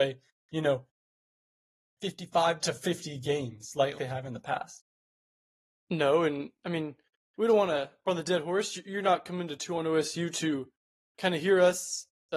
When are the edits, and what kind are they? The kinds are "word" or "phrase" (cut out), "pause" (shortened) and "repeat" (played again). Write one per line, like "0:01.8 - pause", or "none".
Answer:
0:02.6 - word
0:03.9 - word
0:08.0 - word